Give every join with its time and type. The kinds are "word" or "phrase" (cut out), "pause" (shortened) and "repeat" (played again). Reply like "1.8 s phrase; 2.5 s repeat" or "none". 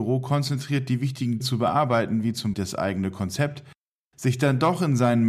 1.4 s word; 2.5 s word